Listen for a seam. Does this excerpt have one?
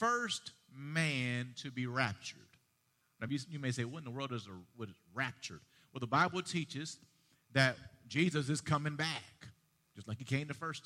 no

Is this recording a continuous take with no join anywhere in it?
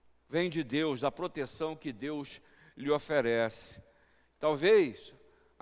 yes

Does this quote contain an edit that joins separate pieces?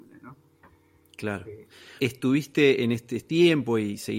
yes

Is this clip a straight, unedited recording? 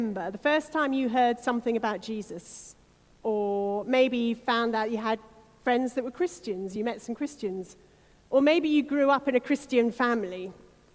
yes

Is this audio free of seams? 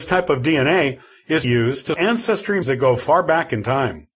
no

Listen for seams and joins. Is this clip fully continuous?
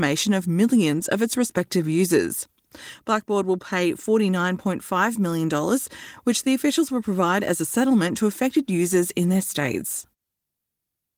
yes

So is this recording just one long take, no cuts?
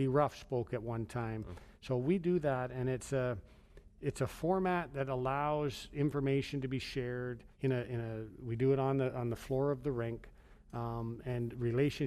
no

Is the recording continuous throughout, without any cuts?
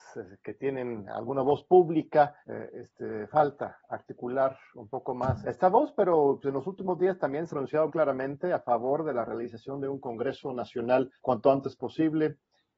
no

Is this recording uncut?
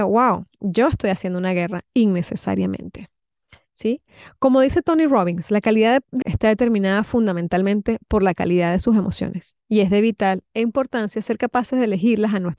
no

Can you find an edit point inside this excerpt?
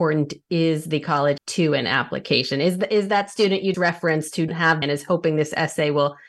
yes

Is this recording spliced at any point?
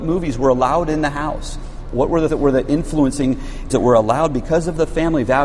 yes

